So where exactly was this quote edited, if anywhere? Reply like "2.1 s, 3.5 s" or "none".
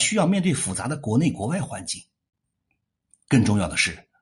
none

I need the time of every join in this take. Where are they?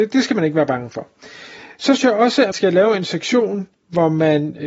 2.0 s, 2.5 s

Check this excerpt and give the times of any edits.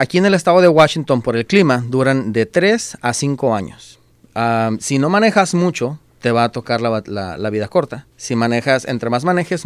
4.1 s, 6.1 s, 8.1 s

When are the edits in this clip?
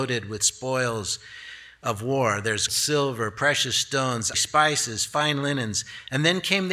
2.7 s, 4.3 s

